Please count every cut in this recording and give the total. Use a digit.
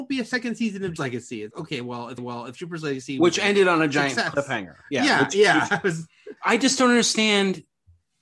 4